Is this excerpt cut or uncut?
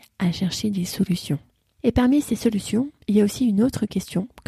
uncut